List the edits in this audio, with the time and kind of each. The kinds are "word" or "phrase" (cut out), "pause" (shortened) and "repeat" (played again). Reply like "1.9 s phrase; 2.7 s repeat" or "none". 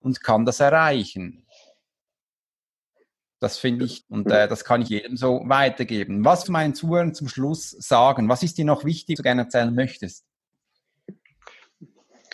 4.0 s word; 4.9 s word; 6.4 s word; 9.2 s word